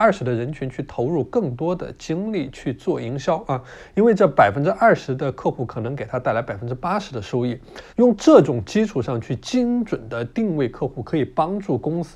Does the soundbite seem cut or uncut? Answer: cut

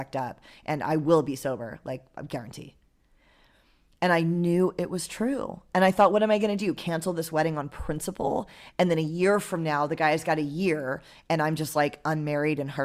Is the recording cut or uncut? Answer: uncut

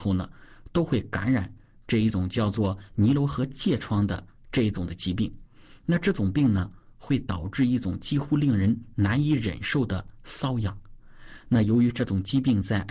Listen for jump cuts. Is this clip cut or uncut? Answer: uncut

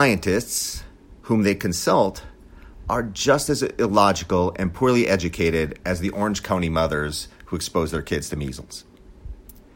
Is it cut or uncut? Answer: cut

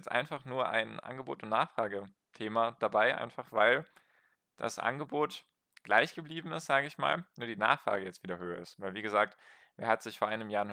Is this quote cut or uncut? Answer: uncut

